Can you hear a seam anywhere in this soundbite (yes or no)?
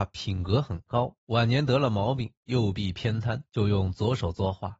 yes